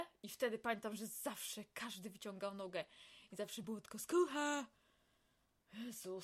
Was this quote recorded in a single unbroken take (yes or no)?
yes